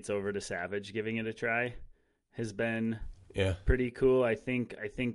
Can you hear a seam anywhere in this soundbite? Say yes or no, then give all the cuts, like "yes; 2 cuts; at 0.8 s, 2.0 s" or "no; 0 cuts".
no; 0 cuts